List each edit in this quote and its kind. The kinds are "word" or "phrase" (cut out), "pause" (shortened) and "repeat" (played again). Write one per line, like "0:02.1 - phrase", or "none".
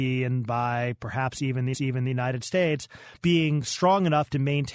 0:01.7 - repeat
0:03.2 - pause